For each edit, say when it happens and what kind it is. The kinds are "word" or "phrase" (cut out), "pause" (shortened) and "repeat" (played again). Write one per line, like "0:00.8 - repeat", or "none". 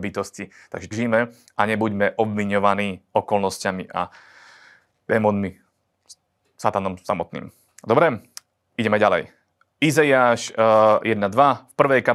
0:00.9 - word